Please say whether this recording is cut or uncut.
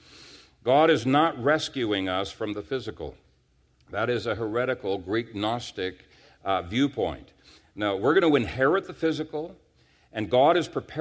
uncut